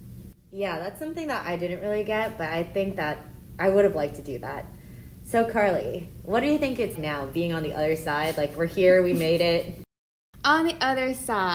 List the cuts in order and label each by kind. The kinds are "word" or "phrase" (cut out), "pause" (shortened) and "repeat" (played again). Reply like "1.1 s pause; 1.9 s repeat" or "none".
7.0 s word